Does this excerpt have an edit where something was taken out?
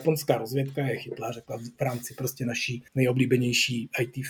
yes; 1 cut; at 2.9 s

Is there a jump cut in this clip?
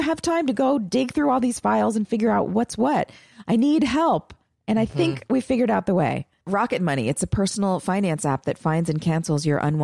no; 0 cuts

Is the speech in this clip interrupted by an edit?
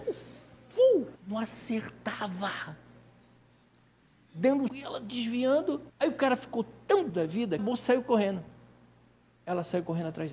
yes; 5 cuts; at 1.2 s, 4.7 s, 5.9 s, 7.1 s, 7.6 s

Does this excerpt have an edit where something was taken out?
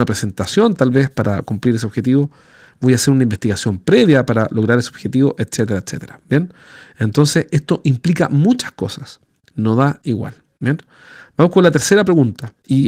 no; 0 cuts

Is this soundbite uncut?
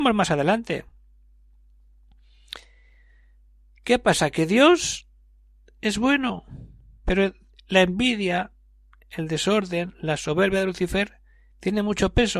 yes; 0 cuts

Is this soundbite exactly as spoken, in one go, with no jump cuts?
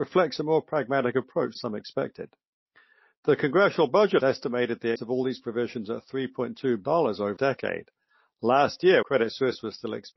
no; 6 cuts; at 1.5 s, 4.2 s, 4.9 s, 6.8 s, 7.4 s, 9.0 s

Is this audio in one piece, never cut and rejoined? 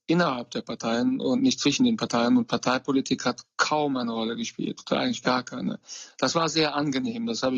yes; 0 cuts

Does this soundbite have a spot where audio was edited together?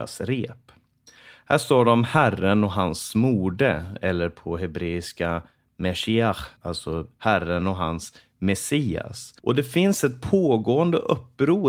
yes; 2 cuts; at 6.6 s, 9.4 s

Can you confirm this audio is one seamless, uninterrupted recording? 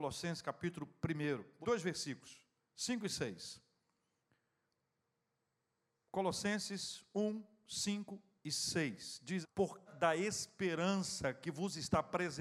no; 3 cuts; at 1.6 s, 9.4 s, 9.9 s

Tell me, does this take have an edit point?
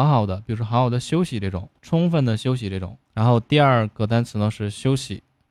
yes; 2 cuts; at 1.8 s, 3.0 s

